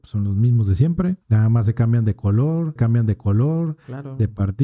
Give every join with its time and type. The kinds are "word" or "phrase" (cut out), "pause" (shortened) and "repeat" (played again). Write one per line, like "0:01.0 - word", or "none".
0:01.2 - pause
0:02.8 - repeat